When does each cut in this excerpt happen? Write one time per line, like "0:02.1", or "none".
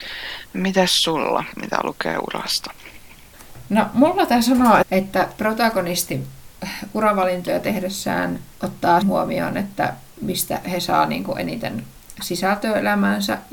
0:04.8
0:09.0